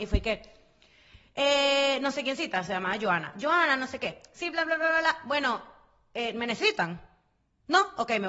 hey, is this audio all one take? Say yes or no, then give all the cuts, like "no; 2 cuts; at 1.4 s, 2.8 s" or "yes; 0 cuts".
yes; 0 cuts